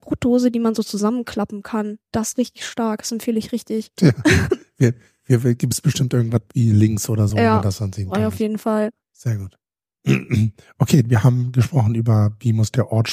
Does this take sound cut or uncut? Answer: uncut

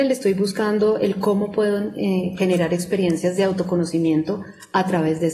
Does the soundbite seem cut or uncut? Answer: uncut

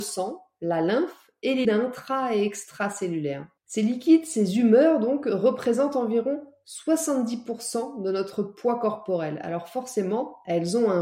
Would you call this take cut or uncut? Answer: cut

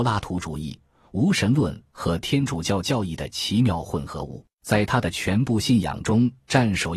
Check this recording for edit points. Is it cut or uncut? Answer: cut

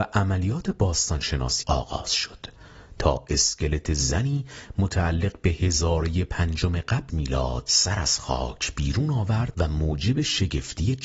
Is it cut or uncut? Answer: cut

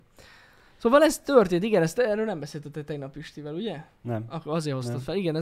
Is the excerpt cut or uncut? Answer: uncut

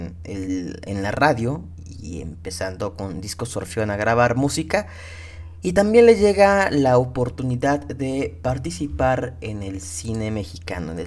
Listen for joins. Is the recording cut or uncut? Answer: uncut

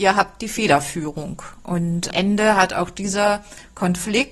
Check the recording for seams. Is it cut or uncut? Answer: cut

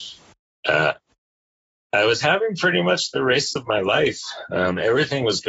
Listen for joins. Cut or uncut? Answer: uncut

